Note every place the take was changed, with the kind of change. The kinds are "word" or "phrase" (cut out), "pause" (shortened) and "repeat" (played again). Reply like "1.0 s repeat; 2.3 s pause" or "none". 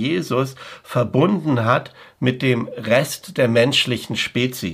none